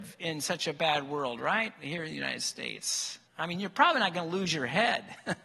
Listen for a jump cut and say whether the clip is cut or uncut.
cut